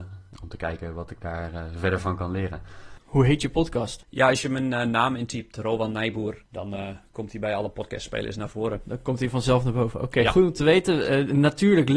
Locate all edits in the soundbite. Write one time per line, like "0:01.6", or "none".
none